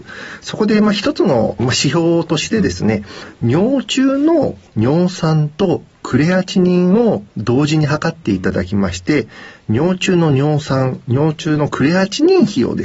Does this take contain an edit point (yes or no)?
yes